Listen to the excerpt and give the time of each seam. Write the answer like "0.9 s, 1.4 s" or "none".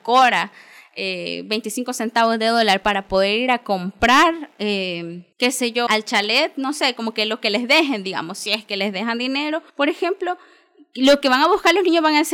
5.3 s, 5.9 s, 9.7 s